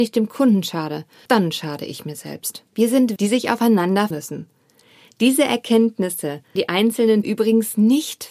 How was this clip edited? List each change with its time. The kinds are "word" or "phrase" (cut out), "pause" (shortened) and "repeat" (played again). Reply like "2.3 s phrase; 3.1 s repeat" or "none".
1.3 s word; 2.7 s pause; 3.2 s word; 4.1 s word; 6.6 s word; 7.2 s word